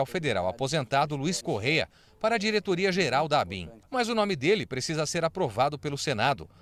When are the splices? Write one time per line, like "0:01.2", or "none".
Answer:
0:01.4